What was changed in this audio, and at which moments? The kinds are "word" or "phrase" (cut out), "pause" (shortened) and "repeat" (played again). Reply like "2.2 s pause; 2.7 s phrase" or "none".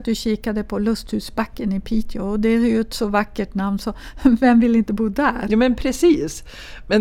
none

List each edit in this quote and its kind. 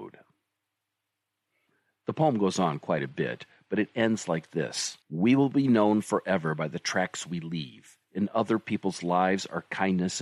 5.0 s pause

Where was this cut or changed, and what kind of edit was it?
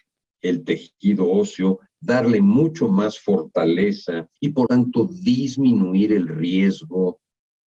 4.4 s pause; 4.7 s word

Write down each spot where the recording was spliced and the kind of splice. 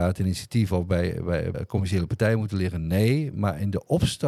1.5 s word

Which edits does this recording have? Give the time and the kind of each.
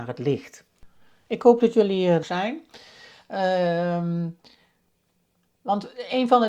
2.2 s word

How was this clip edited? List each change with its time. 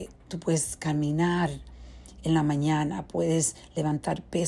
none

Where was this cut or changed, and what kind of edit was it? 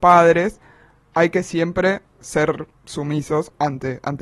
none

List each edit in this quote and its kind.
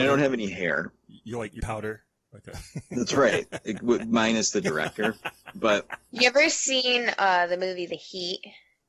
1.6 s word; 4.6 s phrase

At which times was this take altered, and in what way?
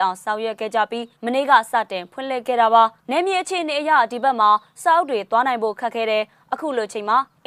1.2 s pause; 3.0 s pause

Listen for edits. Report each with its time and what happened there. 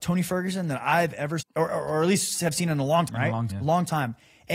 1.4 s word; 3.1 s word; 3.5 s word

